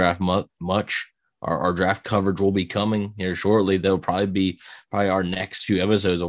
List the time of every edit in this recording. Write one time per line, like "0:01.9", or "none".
none